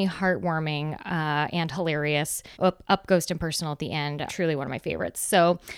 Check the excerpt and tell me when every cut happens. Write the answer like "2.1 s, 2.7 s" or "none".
2.5 s, 4.3 s